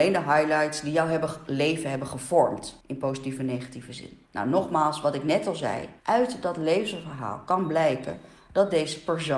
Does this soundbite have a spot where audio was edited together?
yes; 3 cuts; at 2.8 s, 4.3 s, 6.0 s

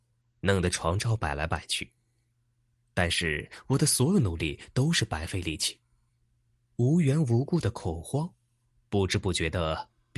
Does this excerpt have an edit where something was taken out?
no; 0 cuts

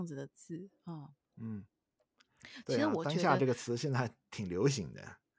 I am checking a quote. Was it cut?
no; 0 cuts

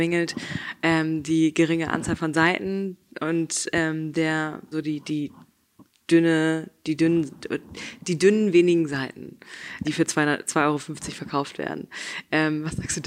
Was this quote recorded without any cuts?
no; 2 cuts; at 4.7 s, 9.8 s

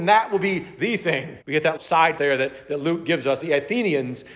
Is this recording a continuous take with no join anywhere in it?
no; 4 cuts; at 1.4 s, 1.8 s, 2.2 s, 3.4 s

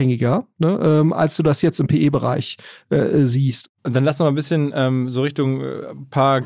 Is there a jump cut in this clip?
no; 0 cuts

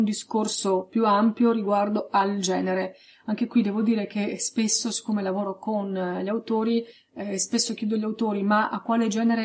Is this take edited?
no; 0 cuts

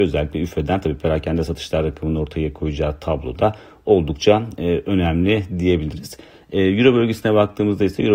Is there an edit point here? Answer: no; 0 cuts

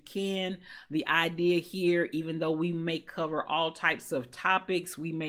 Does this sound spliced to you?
no; 0 cuts

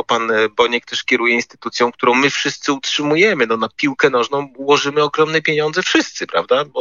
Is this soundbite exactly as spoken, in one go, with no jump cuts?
yes; 0 cuts

